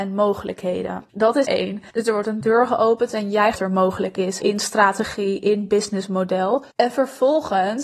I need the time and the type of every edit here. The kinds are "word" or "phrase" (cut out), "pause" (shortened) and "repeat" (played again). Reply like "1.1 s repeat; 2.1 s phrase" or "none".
1.1 s pause; 1.4 s word; 1.9 s pause; 3.5 s phrase; 4.4 s word; 6.7 s pause